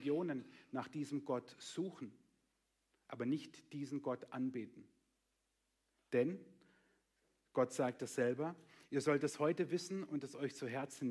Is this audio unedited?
yes; 0 cuts

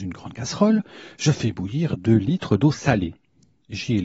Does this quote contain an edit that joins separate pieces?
no; 0 cuts

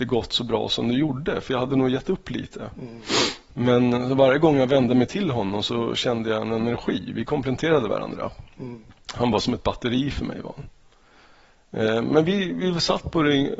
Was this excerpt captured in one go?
yes; 0 cuts

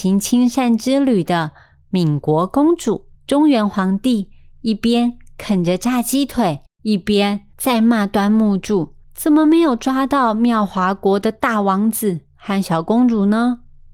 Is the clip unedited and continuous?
no; 4 cuts; at 3.2 s, 6.7 s, 7.5 s, 9.0 s

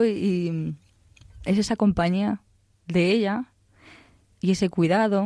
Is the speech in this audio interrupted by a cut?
no; 0 cuts

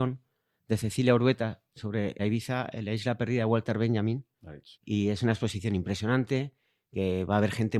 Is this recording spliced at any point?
yes; 2 cuts; at 2.2 s, 4.7 s

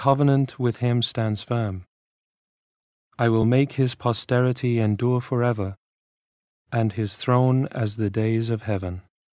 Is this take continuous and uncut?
yes; 0 cuts

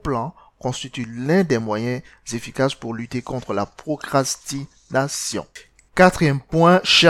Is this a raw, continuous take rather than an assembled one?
yes; 0 cuts

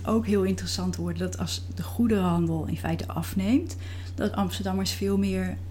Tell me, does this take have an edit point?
no; 0 cuts

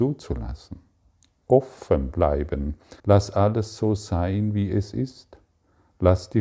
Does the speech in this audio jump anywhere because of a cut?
yes; 1 cut; at 3.0 s

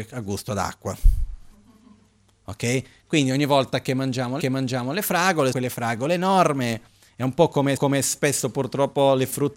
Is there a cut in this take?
yes; 3 cuts; at 4.4 s, 5.5 s, 7.8 s

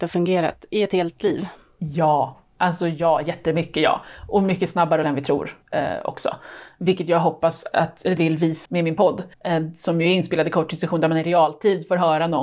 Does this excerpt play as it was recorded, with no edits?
no; 6 cuts; at 5.0 s, 5.6 s, 7.7 s, 8.2 s, 8.6 s, 9.3 s

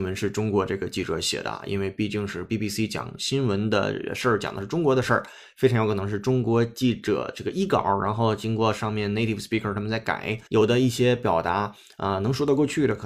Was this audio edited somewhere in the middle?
yes; 1 cut; at 10.5 s

